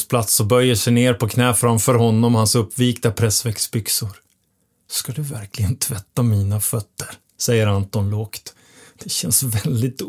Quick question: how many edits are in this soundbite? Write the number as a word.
zero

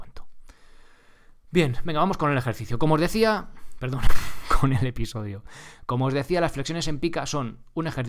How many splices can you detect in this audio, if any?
zero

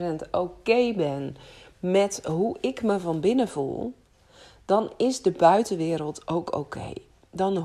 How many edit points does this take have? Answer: zero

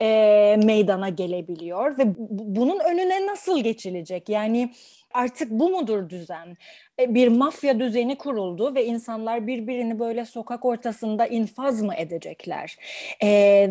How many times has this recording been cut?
zero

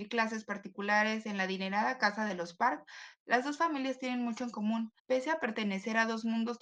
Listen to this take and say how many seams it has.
one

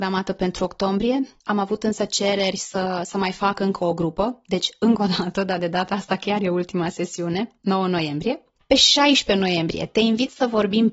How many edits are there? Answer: zero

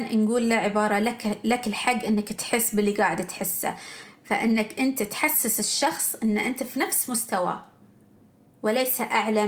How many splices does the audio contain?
zero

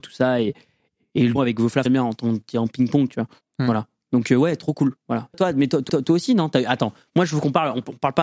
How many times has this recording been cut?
six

